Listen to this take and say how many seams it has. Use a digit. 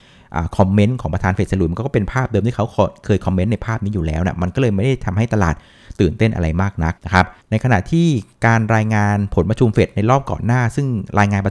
2